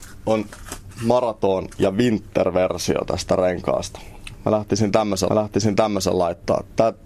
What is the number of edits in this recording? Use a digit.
1